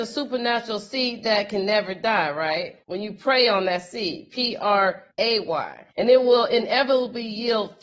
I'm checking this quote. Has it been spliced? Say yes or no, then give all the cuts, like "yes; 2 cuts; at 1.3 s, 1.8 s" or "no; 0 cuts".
yes; 3 cuts; at 2.8 s, 5.1 s, 5.9 s